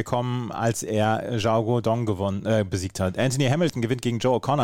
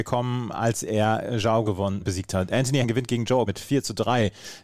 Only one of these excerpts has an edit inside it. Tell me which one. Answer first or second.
second